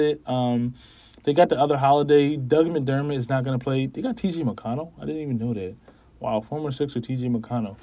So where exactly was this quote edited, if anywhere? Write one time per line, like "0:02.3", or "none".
none